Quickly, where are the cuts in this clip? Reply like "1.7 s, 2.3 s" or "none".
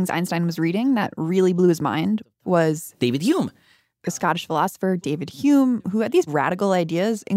6.3 s